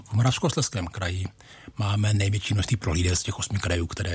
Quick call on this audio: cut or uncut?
uncut